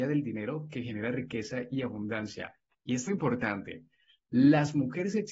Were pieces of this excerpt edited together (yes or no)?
yes